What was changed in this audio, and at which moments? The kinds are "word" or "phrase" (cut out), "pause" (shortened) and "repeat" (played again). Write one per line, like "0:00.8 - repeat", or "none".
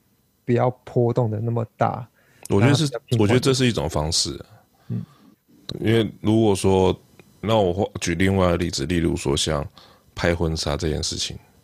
0:05.7 - word
0:07.4 - word

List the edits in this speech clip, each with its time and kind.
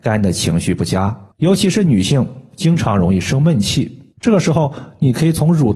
0:01.3 - pause
0:04.1 - pause

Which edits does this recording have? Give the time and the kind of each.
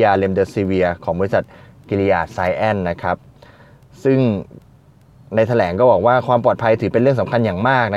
none

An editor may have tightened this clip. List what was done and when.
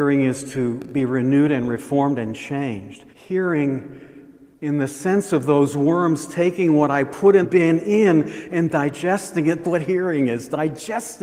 0:03.1 - pause
0:07.4 - word
0:09.6 - word

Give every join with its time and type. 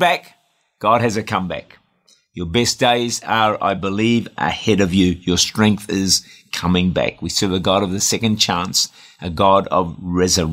none

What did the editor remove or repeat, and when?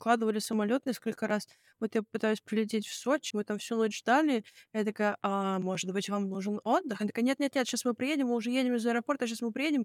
0:03.3 - word

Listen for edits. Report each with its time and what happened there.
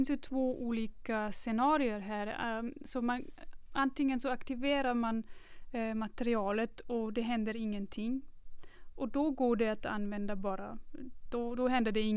none

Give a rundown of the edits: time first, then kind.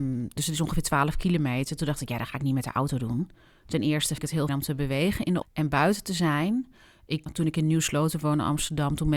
0:04.2 - word
0:04.5 - word
0:05.4 - word
0:07.3 - word

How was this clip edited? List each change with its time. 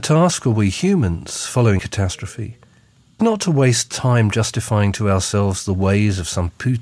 0:01.8 - word
0:03.2 - word

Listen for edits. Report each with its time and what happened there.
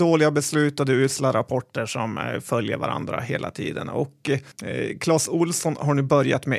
0:04.5 - pause

